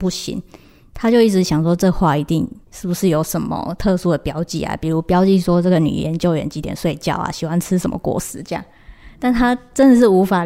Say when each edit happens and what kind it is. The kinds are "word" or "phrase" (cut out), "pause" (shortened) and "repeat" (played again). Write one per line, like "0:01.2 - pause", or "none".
0:02.6 - pause